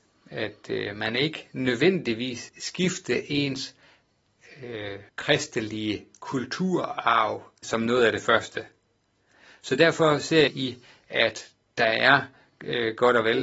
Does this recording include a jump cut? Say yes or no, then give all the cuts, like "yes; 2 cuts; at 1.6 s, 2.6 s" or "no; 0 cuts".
yes; 4 cuts; at 2.5 s, 5.1 s, 7.6 s, 10.5 s